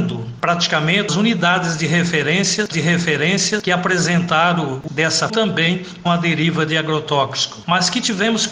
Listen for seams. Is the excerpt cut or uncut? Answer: cut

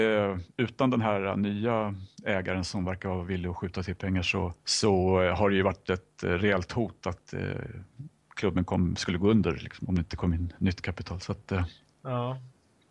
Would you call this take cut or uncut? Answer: cut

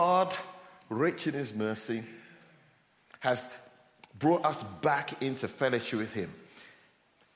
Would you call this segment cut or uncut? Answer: uncut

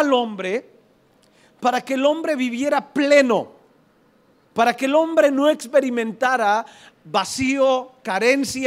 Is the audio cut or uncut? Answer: uncut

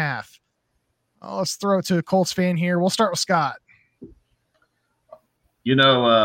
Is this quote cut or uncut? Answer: uncut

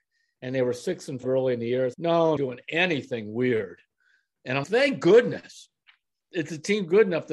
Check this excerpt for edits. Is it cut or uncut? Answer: cut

